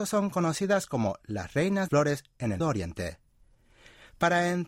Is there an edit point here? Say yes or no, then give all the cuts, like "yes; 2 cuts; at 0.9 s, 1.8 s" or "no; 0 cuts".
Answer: yes; 2 cuts; at 1.9 s, 2.6 s